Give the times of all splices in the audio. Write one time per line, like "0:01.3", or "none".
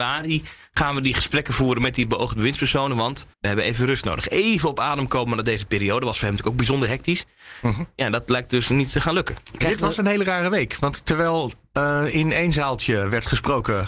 0:03.3